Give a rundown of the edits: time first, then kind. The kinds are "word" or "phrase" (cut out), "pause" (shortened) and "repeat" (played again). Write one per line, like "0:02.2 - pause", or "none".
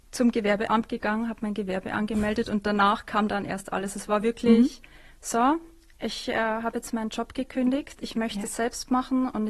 none